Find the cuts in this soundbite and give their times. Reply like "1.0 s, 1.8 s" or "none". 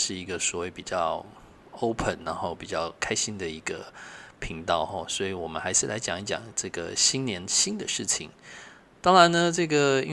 none